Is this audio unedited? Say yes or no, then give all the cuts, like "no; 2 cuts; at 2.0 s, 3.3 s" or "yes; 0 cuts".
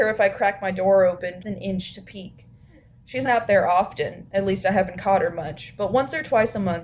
no; 2 cuts; at 1.4 s, 3.3 s